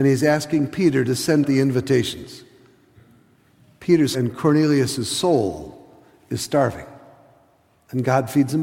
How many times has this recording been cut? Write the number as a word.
two